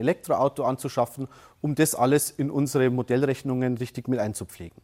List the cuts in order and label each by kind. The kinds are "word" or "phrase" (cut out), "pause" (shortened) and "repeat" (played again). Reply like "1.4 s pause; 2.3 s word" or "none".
none